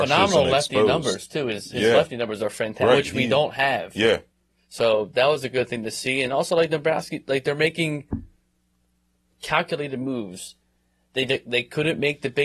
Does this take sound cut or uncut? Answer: uncut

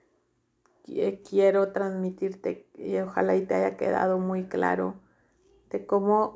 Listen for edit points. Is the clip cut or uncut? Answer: uncut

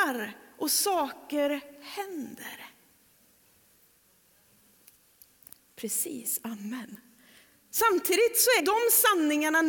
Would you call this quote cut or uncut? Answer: cut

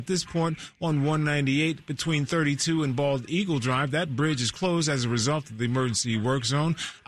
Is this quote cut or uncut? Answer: uncut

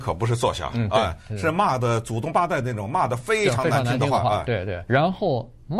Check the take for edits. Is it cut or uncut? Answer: cut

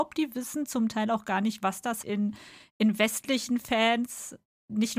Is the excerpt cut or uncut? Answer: cut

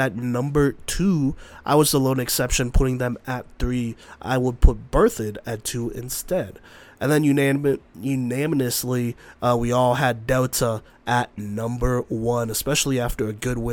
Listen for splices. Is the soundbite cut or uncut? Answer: uncut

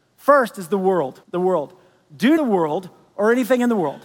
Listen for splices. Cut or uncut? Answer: cut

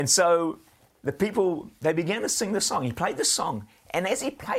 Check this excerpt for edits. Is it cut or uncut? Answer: uncut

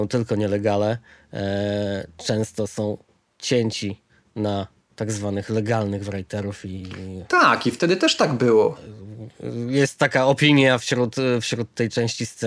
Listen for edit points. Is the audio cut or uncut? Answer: uncut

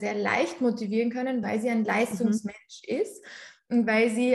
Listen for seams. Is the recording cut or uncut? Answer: uncut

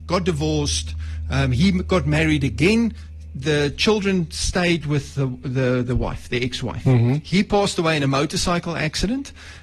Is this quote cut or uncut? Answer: uncut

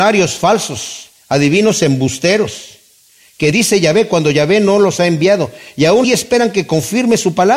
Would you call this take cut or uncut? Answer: cut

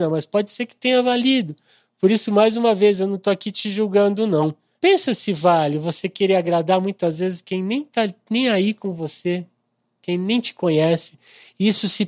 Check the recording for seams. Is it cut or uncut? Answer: uncut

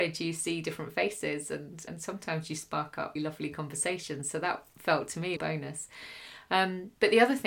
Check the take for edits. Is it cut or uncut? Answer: cut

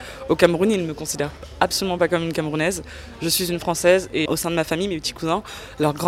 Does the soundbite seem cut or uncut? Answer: cut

